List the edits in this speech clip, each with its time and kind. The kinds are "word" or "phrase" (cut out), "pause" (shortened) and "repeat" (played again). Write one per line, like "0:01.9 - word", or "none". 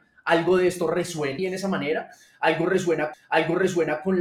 0:01.4 - word
0:03.1 - repeat